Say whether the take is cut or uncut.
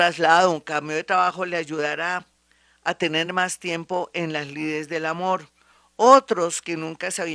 uncut